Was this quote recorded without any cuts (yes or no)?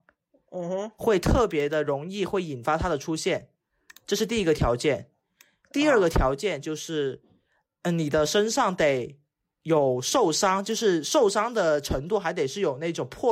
yes